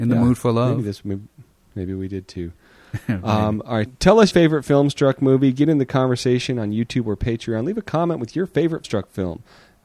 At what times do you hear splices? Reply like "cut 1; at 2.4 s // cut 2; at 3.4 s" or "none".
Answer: cut 1; at 1.5 s // cut 2; at 4.3 s // cut 3; at 8.8 s